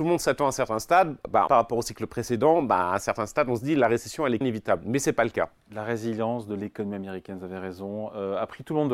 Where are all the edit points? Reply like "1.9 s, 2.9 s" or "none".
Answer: 1.5 s, 4.4 s, 5.6 s